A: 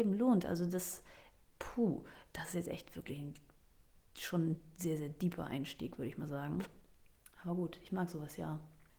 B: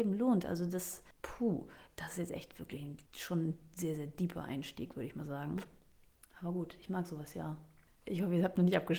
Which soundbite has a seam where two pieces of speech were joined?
B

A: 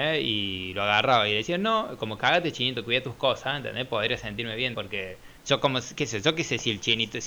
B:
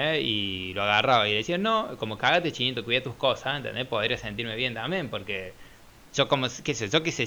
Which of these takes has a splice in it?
A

